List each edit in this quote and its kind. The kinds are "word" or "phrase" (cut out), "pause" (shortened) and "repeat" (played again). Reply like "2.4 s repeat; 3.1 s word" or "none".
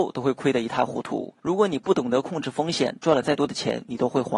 1.4 s pause